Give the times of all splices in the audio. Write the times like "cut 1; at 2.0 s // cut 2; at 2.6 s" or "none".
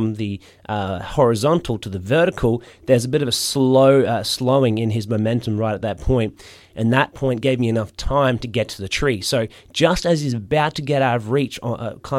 none